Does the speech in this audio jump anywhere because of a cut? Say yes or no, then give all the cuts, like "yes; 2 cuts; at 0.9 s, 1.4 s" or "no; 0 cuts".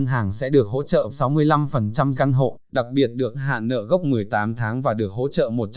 yes; 4 cuts; at 1.1 s, 2.1 s, 2.6 s, 3.3 s